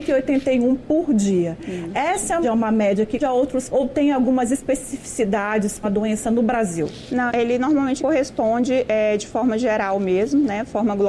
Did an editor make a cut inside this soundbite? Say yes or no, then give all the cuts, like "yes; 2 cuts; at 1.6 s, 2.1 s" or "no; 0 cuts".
yes; 6 cuts; at 2.4 s, 3.2 s, 3.7 s, 5.8 s, 7.3 s, 8.0 s